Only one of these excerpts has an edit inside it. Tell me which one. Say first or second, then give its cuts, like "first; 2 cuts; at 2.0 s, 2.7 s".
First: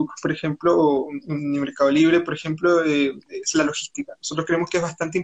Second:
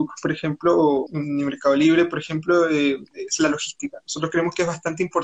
second; 1 cut; at 1.1 s